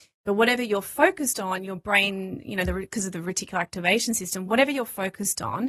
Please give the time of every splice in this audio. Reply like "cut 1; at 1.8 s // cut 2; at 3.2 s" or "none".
none